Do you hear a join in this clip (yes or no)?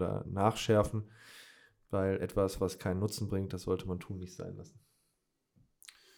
no